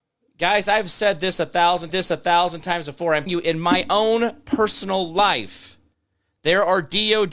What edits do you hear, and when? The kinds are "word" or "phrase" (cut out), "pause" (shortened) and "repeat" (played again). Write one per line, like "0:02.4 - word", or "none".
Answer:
0:01.9 - repeat
0:03.3 - word